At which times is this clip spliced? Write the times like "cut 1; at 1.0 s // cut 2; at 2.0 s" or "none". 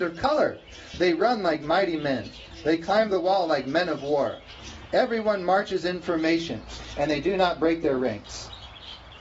none

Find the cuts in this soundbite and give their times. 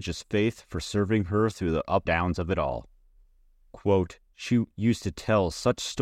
cut 1; at 2.1 s

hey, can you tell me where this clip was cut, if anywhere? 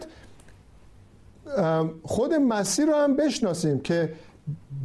none

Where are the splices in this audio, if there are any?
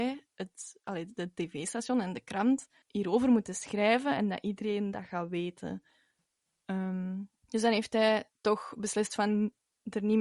cut 1; at 2.8 s // cut 2; at 7.4 s

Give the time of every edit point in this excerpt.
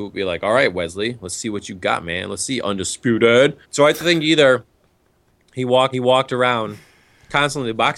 cut 1; at 3.6 s // cut 2; at 5.9 s

